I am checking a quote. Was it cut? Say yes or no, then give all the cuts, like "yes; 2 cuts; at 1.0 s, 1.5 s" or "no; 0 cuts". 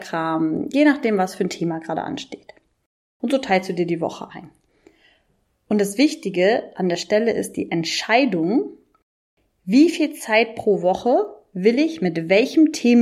no; 0 cuts